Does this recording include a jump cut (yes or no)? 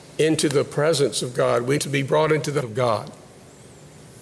yes